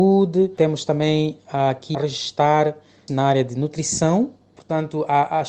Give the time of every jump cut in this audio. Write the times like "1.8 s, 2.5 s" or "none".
1.9 s, 3.1 s

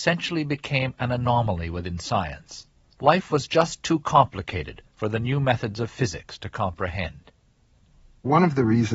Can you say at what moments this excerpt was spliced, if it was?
2.9 s

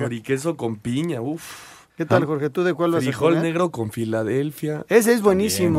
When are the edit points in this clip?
1.9 s

